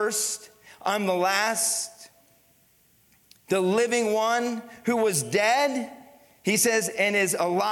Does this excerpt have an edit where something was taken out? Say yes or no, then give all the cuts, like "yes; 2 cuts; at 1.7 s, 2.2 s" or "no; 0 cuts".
no; 0 cuts